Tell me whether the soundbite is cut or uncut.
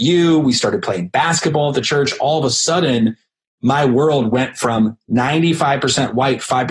uncut